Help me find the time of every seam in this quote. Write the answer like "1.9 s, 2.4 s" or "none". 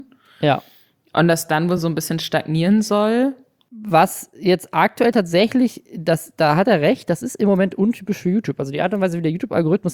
none